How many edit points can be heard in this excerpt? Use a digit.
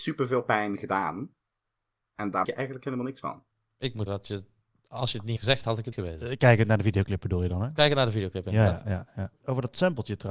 4